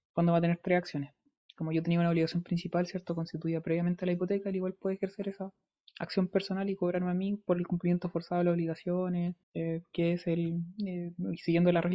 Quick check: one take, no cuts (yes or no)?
no